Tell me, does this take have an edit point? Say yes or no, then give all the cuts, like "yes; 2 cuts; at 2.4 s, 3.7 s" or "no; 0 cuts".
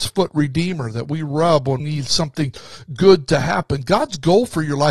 yes; 1 cut; at 1.8 s